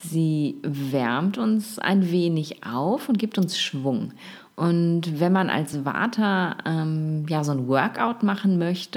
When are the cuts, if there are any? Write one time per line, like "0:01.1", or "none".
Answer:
none